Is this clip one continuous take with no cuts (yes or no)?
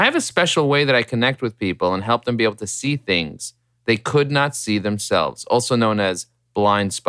yes